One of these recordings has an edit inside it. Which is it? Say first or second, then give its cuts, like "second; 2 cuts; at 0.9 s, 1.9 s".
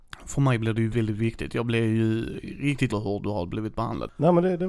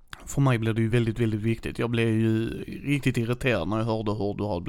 first; 2 cuts; at 0.9 s, 2.9 s